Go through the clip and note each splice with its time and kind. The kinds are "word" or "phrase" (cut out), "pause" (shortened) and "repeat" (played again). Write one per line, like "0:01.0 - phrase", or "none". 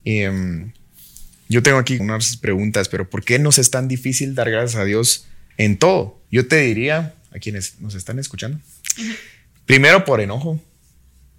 0:02.0 - word
0:05.5 - pause
0:06.3 - pause